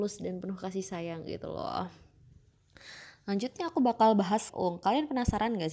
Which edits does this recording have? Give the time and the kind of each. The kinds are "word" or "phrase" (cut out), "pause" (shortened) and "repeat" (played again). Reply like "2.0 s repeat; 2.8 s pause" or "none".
4.5 s word